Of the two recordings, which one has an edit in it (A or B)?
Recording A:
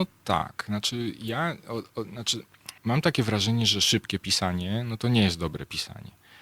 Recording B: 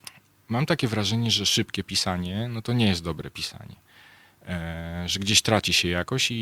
A